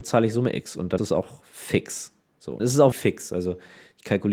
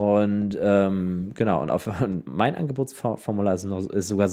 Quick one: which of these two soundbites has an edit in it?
first; 3 cuts; at 1.0 s, 2.6 s, 2.9 s

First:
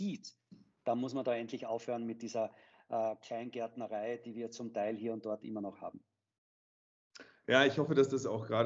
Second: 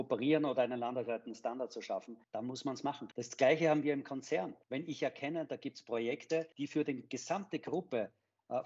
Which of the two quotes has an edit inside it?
second; 4 cuts; at 2.2 s, 3.1 s, 4.6 s, 6.5 s

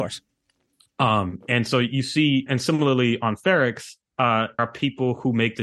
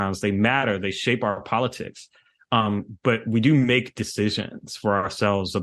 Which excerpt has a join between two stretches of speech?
first; 3 cuts; at 2.5 s, 4.1 s, 4.6 s

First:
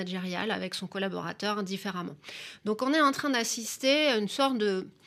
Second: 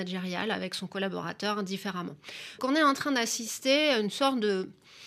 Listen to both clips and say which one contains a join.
second; 1 cut; at 2.6 s

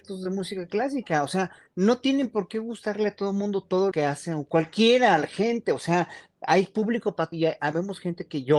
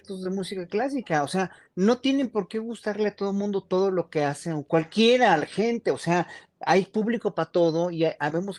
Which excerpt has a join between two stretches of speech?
first; 2 cuts; at 3.9 s, 7.3 s

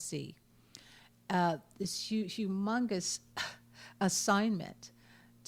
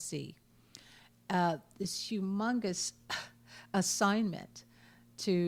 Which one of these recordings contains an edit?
second; 1 cut; at 2.1 s

